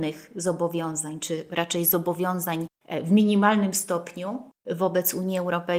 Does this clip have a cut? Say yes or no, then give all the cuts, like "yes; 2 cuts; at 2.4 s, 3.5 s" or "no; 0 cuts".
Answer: no; 0 cuts